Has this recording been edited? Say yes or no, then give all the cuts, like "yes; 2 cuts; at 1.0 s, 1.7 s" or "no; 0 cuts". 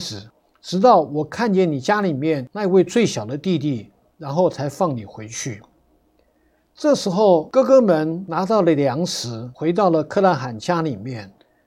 no; 0 cuts